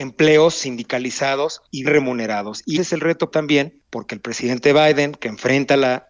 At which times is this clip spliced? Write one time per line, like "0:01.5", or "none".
0:01.8
0:02.8
0:03.3